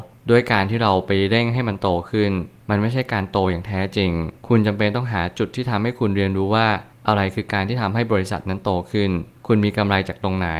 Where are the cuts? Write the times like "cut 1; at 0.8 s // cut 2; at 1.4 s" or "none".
cut 1; at 4.4 s